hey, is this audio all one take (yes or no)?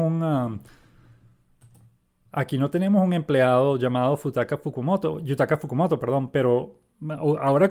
yes